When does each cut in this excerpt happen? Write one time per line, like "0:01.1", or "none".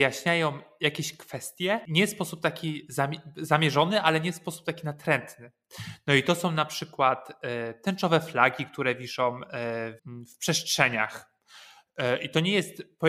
0:10.0